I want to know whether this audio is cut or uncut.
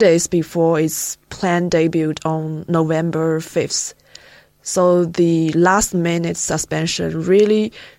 uncut